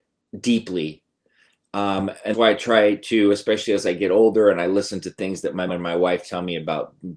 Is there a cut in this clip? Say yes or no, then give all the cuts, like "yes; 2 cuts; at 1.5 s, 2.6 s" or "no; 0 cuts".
yes; 2 cuts; at 2.3 s, 5.7 s